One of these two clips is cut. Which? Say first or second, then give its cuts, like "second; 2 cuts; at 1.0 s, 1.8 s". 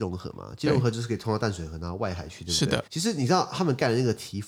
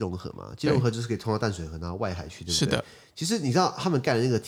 first; 1 cut; at 2.9 s